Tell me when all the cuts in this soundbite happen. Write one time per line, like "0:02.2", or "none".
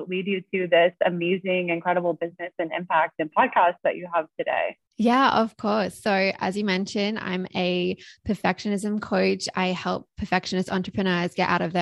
0:04.9